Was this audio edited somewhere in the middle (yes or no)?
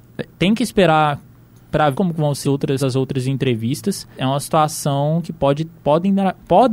yes